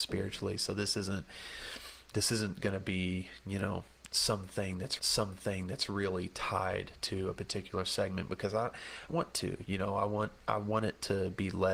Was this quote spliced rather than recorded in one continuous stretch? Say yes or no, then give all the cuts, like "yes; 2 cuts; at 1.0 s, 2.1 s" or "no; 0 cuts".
yes; 2 cuts; at 5.0 s, 9.1 s